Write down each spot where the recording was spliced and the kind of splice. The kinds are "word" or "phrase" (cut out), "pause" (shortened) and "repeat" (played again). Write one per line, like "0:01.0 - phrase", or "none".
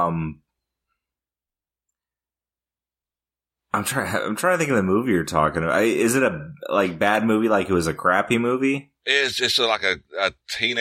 none